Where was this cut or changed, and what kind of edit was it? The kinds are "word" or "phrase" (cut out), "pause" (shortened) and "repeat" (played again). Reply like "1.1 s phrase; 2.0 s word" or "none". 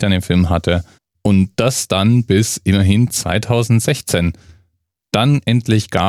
1.0 s pause